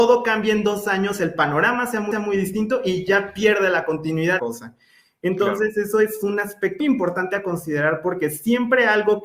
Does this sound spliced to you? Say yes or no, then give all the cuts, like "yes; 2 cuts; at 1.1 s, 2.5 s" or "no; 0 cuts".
yes; 3 cuts; at 2.1 s, 4.4 s, 6.8 s